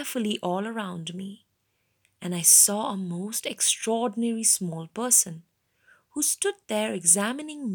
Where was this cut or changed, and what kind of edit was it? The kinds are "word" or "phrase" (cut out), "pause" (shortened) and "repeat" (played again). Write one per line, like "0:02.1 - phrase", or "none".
none